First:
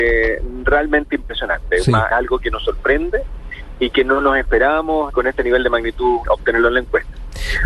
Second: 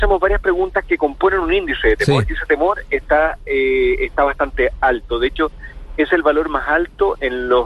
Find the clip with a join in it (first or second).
first